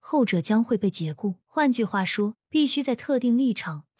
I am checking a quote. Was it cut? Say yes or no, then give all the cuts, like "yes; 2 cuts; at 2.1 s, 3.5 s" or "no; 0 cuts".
yes; 2 cuts; at 1.4 s, 2.4 s